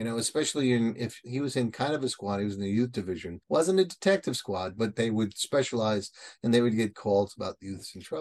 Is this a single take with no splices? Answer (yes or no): no